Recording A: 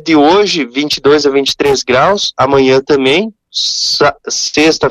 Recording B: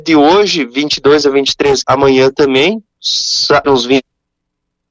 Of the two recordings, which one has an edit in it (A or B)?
B